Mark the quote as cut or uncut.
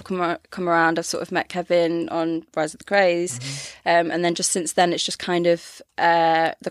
uncut